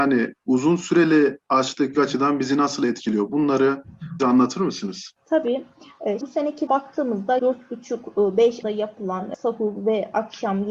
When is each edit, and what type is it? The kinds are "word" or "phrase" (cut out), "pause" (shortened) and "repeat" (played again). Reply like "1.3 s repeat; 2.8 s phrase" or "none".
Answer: 1.9 s word; 4.2 s word; 6.2 s word; 6.7 s word; 7.4 s word; 8.6 s word